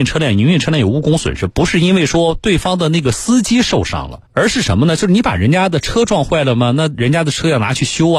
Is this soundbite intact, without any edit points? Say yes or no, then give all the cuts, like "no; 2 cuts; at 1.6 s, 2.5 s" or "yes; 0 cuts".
no; 1 cut; at 4.3 s